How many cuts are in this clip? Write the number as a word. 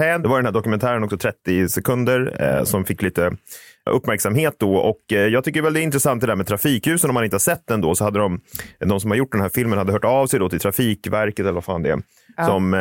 zero